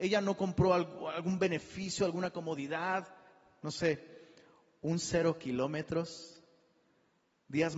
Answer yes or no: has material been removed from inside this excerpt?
no